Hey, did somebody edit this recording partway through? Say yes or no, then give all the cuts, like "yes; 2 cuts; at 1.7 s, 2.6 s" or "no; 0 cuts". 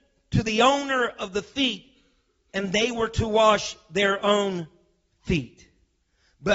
no; 0 cuts